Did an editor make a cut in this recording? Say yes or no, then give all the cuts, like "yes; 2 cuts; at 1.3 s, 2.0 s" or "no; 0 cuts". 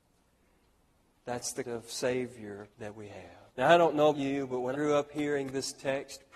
yes; 5 cuts; at 1.6 s, 2.7 s, 3.5 s, 4.1 s, 4.7 s